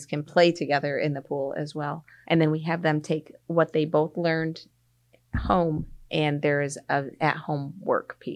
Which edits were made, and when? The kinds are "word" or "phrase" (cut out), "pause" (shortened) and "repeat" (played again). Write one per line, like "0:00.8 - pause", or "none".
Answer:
none